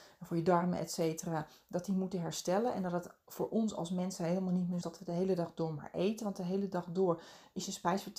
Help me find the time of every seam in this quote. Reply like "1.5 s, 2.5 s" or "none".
4.8 s

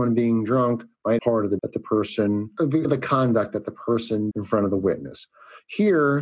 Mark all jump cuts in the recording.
1.2 s, 1.6 s, 2.8 s, 4.3 s

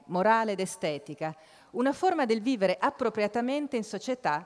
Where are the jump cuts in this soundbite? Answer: none

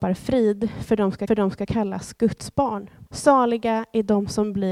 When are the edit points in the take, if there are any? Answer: 1.3 s, 3.1 s

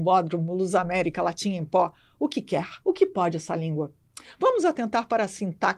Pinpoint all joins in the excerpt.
2.8 s

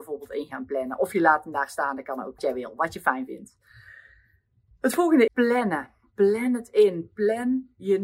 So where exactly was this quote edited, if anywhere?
2.4 s, 5.3 s

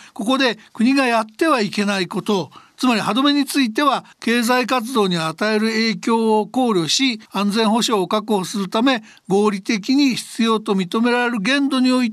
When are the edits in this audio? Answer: 4.1 s, 7.3 s

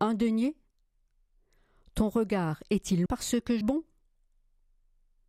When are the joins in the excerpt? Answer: 3.1 s, 3.6 s

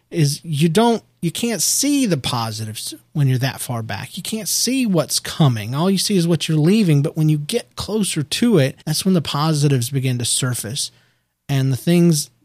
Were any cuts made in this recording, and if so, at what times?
8.8 s

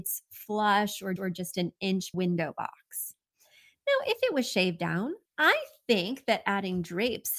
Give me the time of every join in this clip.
1.2 s, 2.1 s, 5.3 s

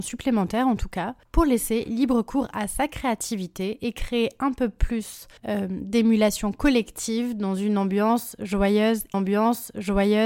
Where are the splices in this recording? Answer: 5.4 s, 9.1 s

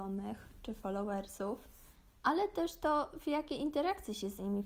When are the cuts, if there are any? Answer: 2.2 s

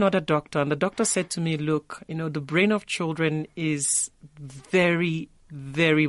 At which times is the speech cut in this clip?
none

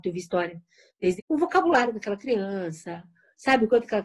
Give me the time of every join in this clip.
1.2 s

